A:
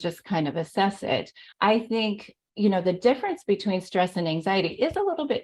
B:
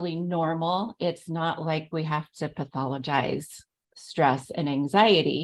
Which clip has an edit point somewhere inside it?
A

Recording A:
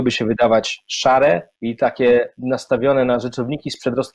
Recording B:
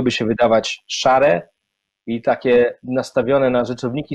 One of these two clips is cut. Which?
A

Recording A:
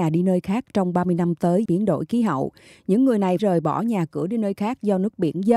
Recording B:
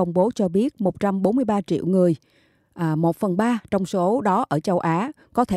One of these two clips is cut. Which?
A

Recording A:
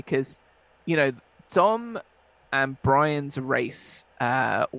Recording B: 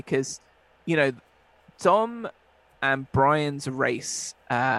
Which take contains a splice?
A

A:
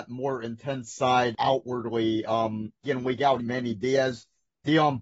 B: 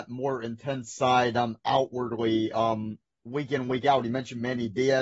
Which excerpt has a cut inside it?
A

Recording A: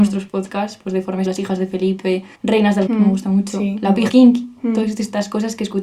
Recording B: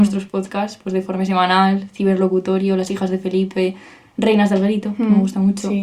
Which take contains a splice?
A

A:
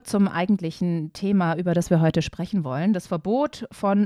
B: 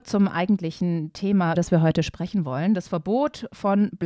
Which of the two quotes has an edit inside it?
B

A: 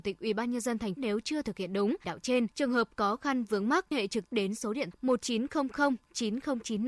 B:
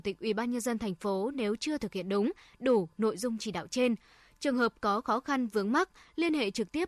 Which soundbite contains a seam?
A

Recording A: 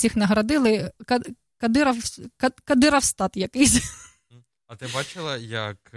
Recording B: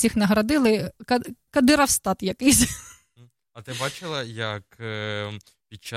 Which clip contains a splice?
B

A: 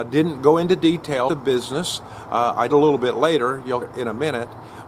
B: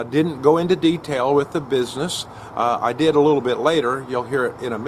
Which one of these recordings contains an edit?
A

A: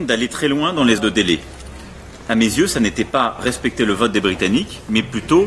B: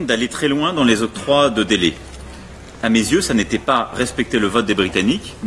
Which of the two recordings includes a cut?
A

